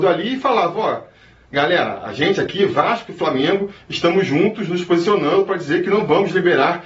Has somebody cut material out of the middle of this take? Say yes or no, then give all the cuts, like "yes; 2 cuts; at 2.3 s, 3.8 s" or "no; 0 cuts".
no; 0 cuts